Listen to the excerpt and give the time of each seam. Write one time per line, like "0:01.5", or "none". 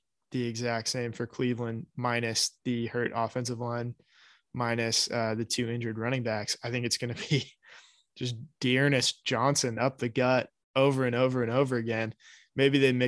none